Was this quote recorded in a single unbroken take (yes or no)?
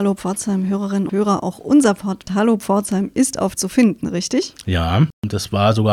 no